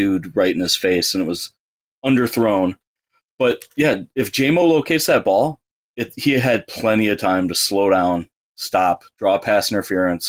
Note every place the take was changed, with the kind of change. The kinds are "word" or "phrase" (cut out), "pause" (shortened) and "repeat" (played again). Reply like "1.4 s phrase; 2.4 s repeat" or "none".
none